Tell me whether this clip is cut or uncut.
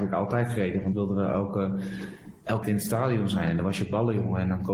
cut